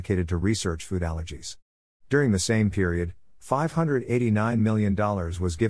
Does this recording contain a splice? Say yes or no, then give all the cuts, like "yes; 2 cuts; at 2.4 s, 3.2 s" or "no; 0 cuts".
no; 0 cuts